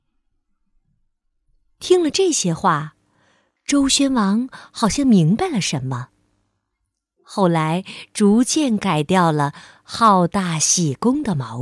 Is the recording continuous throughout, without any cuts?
yes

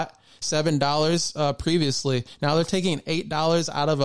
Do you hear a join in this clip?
no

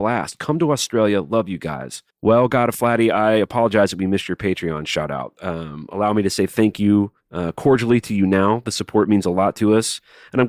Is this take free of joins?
no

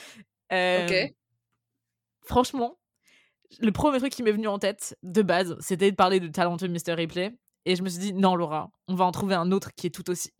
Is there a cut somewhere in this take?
no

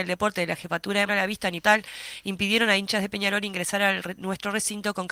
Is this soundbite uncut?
no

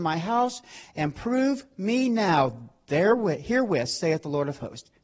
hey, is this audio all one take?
yes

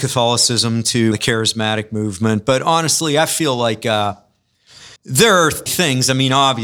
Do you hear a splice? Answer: yes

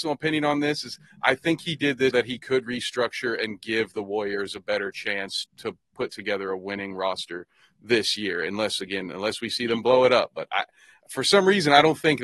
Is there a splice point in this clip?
yes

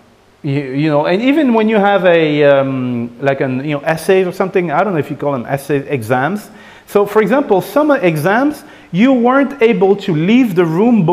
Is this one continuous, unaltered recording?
yes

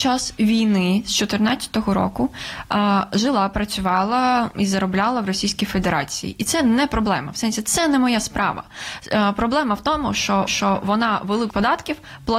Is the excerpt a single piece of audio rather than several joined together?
no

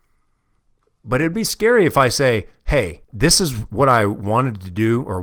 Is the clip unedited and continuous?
no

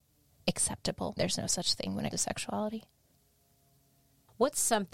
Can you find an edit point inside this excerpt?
yes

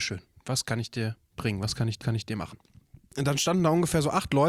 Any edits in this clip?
yes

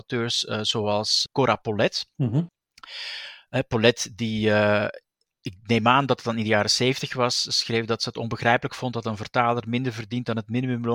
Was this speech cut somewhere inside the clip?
yes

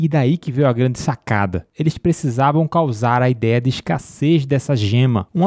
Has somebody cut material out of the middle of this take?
no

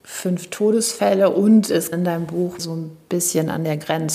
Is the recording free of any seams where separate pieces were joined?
no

